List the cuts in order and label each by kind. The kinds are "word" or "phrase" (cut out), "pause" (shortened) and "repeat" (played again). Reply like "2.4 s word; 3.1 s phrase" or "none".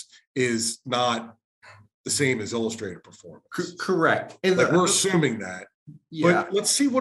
none

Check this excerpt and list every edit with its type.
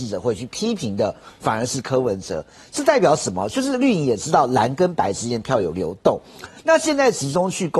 none

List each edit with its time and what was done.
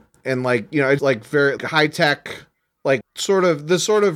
1.0 s word; 1.6 s word; 3.0 s word

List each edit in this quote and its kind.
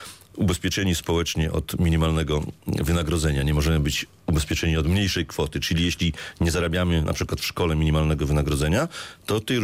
none

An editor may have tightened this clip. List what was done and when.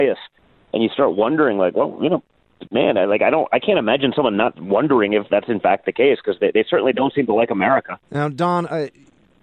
8.0 s pause

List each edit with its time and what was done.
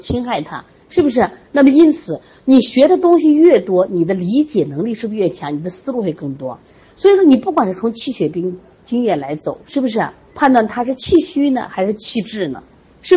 10.3 s pause

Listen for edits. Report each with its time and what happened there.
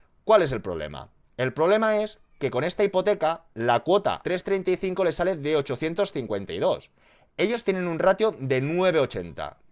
4.2 s word

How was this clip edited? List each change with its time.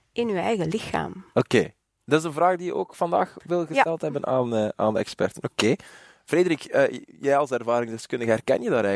none

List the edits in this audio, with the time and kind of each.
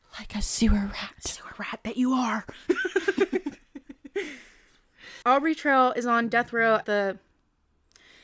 5.2 s pause; 6.8 s word

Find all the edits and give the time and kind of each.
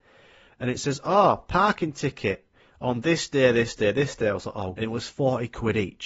4.8 s word

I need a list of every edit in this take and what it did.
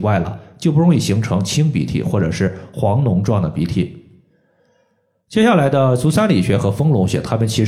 none

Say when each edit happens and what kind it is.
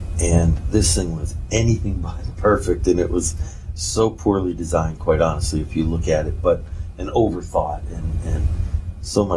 none

